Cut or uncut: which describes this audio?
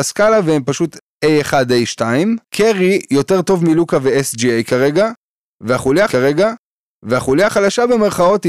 cut